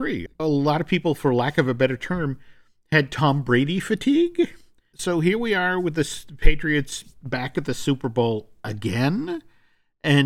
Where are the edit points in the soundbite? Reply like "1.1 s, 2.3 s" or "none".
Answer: none

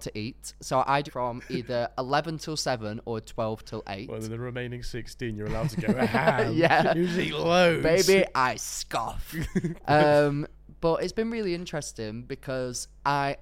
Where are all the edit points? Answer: 1.1 s

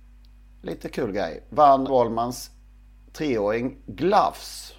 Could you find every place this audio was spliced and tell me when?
1.9 s

